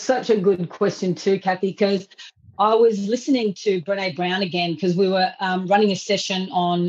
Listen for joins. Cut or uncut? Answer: uncut